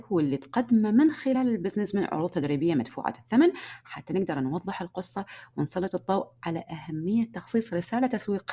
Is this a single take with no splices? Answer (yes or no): yes